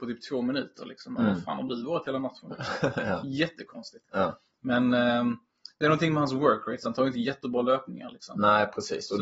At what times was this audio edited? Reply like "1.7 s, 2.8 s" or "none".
none